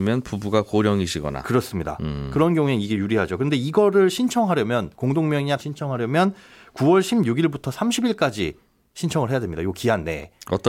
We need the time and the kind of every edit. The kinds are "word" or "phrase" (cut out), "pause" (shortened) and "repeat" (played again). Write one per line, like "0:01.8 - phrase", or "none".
0:05.6 - word